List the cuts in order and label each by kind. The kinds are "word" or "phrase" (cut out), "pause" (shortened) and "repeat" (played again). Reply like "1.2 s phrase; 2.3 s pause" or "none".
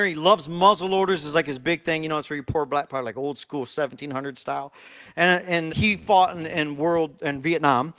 5.7 s word